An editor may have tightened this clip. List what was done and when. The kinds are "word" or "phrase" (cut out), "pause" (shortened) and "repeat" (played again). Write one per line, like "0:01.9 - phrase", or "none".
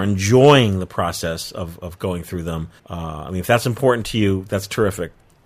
0:02.8 - pause